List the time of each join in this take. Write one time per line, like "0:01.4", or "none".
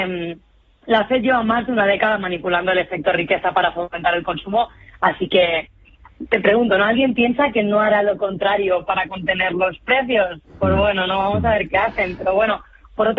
none